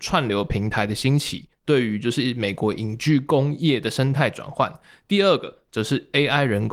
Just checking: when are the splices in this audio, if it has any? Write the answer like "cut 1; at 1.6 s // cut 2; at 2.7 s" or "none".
none